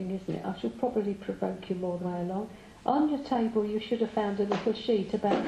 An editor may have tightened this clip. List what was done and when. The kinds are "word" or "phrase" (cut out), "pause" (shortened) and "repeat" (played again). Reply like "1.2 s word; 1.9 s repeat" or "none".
2.0 s phrase